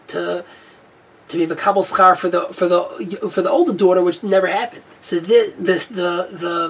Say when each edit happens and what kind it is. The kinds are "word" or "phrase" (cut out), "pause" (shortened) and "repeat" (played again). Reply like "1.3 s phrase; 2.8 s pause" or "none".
4.9 s pause